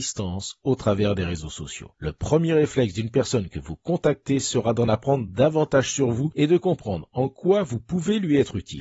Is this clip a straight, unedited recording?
yes; 0 cuts

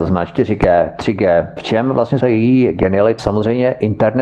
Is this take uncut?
no; 3 cuts; at 1.6 s, 2.2 s, 3.2 s

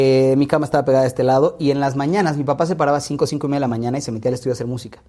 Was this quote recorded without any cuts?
yes; 0 cuts

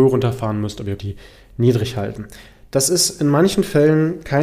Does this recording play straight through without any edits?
no; 1 cut; at 1.0 s

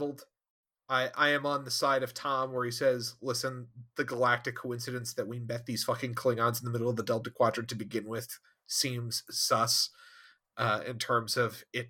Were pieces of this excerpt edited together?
no; 0 cuts

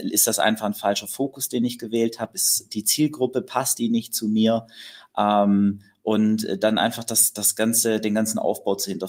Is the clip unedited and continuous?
yes; 0 cuts

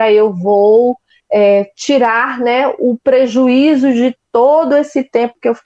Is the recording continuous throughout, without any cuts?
yes; 0 cuts

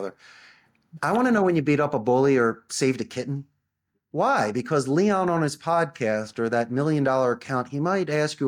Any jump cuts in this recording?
no; 0 cuts

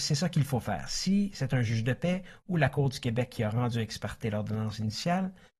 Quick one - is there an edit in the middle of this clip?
no; 0 cuts

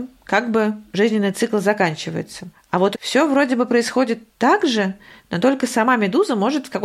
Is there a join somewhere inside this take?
yes; 2 cuts; at 2.9 s, 4.3 s

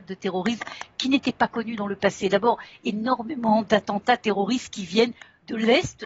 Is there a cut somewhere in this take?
no; 0 cuts

